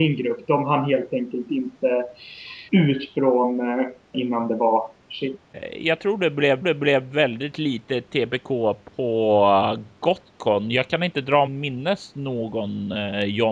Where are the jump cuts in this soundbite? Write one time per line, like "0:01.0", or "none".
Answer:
0:02.7
0:04.1
0:06.6
0:11.5